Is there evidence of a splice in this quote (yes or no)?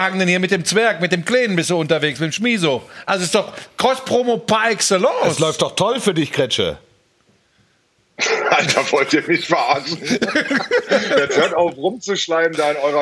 no